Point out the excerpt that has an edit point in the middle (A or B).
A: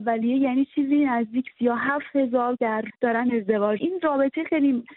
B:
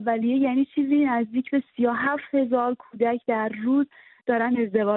A